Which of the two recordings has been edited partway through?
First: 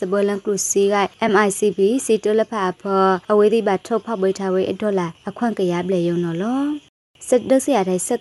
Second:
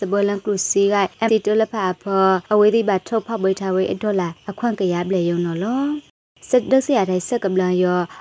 second; 1 cut; at 1.3 s

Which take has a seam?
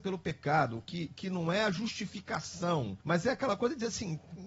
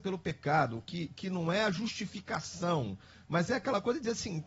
first; 1 cut; at 3.0 s

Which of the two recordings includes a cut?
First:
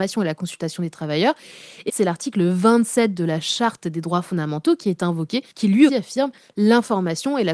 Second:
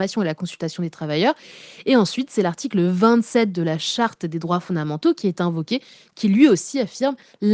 first; 3 cuts; at 1.9 s, 5.5 s, 5.9 s

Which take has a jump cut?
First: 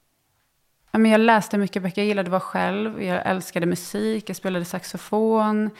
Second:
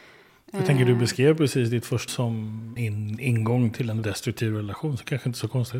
second; 3 cuts; at 2.1 s, 2.8 s, 4.0 s

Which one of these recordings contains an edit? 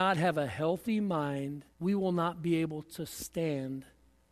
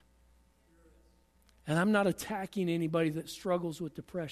first; 1 cut; at 1.7 s

